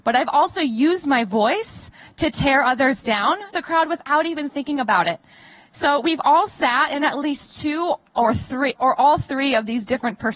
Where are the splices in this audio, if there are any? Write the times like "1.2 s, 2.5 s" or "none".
3.5 s, 8.8 s